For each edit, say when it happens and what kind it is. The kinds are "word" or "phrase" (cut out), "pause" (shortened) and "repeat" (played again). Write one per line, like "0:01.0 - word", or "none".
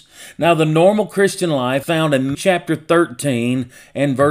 0:01.8 - word
0:02.3 - word